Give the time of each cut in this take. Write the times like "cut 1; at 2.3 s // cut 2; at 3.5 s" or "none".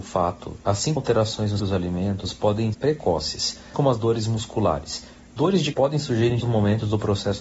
cut 1; at 1.0 s // cut 2; at 1.6 s // cut 3; at 2.7 s // cut 4; at 3.7 s // cut 5; at 5.7 s // cut 6; at 6.4 s

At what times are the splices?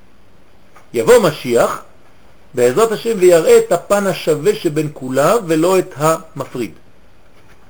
none

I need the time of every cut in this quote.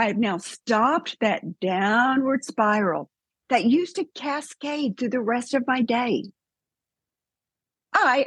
none

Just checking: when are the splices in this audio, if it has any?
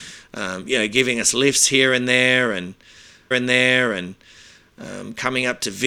cut 1; at 3.3 s

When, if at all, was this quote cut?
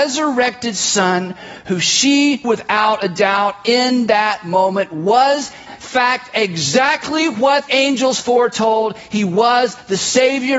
cut 1; at 2.4 s // cut 2; at 5.7 s // cut 3; at 7.7 s

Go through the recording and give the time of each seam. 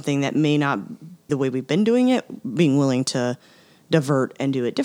cut 1; at 1.3 s

